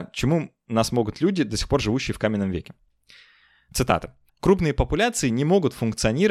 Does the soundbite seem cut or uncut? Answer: cut